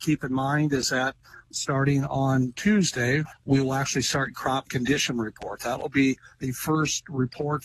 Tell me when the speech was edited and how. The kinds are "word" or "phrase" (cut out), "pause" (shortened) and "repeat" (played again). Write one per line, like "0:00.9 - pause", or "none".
0:01.4 - pause
0:03.3 - word
0:04.3 - phrase